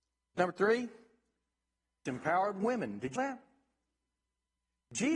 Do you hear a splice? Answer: yes; 2 cuts; at 2.1 s, 3.2 s

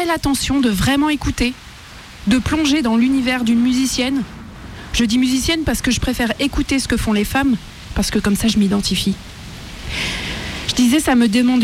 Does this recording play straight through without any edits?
yes; 0 cuts

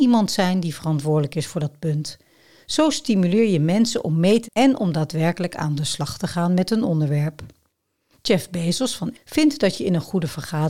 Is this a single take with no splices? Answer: no; 2 cuts; at 4.4 s, 9.1 s

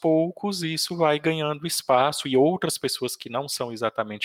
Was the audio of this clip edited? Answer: no; 0 cuts

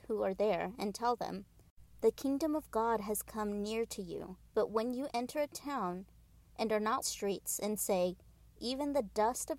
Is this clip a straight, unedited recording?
no; 2 cuts; at 4.5 s, 7.0 s

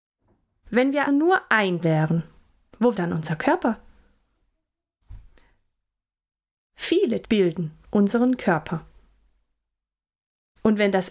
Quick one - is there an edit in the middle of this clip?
yes; 4 cuts; at 1.1 s, 1.8 s, 2.9 s, 7.2 s

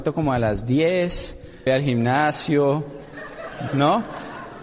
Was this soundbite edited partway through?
yes; 2 cuts; at 1.7 s, 3.7 s

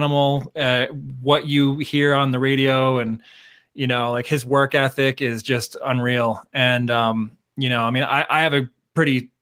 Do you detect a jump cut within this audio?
no; 0 cuts

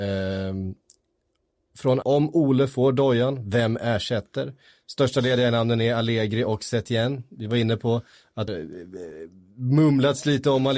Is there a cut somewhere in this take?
yes; 2 cuts; at 2.0 s, 8.5 s

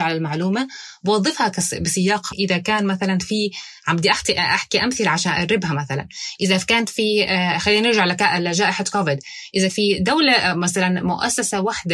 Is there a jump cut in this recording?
yes; 2 cuts; at 2.3 s, 9.7 s

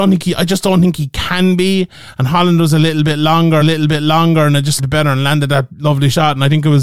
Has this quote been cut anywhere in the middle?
yes; 2 cuts; at 3.6 s, 4.8 s

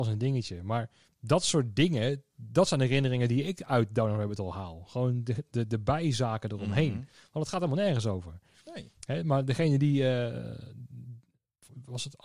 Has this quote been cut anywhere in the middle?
no; 0 cuts

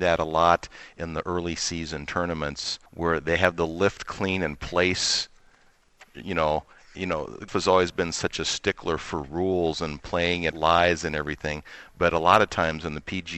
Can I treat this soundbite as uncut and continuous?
no; 3 cuts; at 2.9 s, 7.5 s, 10.5 s

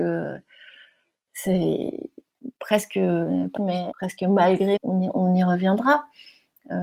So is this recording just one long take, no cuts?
no; 3 cuts; at 3.6 s, 3.9 s, 4.8 s

